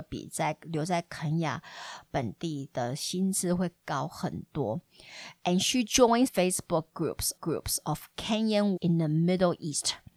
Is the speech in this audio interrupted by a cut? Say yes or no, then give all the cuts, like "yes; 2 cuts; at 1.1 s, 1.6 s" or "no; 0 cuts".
yes; 3 cuts; at 6.3 s, 7.4 s, 8.8 s